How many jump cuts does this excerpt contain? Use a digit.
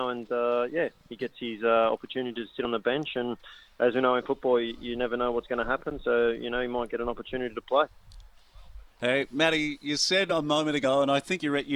0